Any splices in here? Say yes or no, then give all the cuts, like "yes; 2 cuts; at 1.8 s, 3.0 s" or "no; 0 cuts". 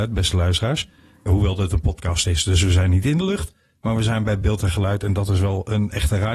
no; 0 cuts